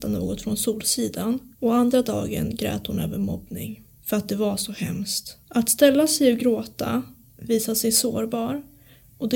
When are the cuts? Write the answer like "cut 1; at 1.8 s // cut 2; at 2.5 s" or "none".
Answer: cut 1; at 1.5 s // cut 2; at 5.4 s